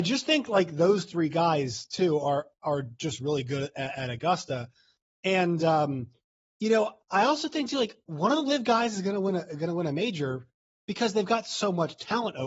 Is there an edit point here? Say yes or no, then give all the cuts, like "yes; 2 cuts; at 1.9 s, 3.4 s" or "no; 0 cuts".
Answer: no; 0 cuts